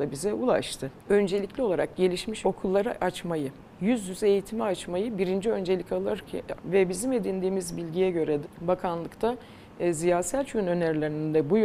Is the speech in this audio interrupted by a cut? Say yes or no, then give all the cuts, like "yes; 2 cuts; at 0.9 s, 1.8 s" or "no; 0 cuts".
yes; 5 cuts; at 1.0 s, 2.4 s, 3.7 s, 6.6 s, 8.4 s